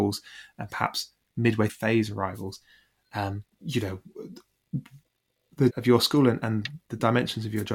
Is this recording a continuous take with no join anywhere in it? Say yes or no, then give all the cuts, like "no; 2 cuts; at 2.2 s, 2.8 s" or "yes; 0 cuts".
no; 3 cuts; at 1.7 s, 3.5 s, 5.7 s